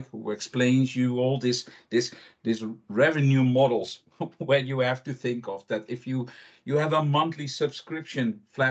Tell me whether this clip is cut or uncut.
uncut